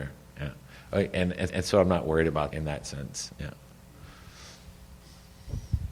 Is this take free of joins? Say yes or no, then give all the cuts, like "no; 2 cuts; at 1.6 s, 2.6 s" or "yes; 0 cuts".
no; 2 cuts; at 1.5 s, 2.5 s